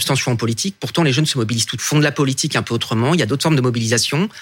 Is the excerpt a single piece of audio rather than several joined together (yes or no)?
no